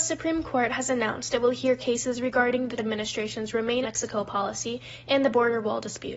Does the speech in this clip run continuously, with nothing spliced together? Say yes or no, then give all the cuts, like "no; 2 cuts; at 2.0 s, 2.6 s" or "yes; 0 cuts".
no; 2 cuts; at 2.8 s, 3.8 s